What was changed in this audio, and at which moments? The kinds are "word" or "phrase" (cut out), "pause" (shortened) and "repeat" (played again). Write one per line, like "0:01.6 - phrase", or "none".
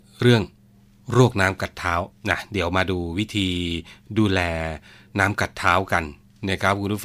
0:02.1 - pause